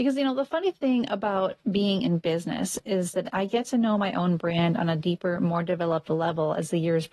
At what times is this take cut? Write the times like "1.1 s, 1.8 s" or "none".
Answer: none